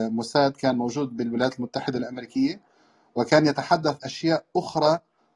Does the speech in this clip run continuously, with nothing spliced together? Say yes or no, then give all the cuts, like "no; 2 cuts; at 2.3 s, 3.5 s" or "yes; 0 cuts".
no; 1 cut; at 4.0 s